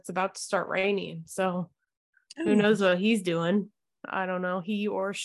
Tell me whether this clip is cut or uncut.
uncut